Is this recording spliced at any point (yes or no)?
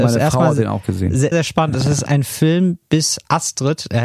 yes